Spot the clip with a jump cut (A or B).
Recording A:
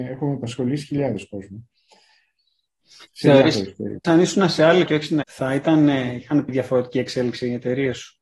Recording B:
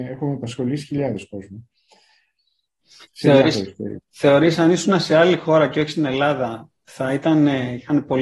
A